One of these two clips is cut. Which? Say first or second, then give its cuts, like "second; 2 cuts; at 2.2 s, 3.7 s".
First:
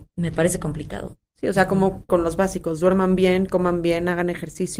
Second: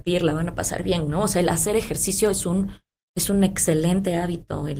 first; 1 cut; at 2.1 s